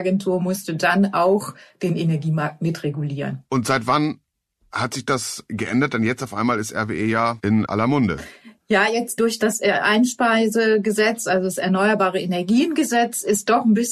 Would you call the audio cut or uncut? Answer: uncut